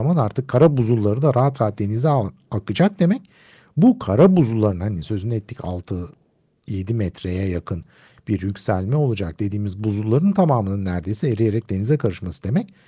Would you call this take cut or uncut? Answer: uncut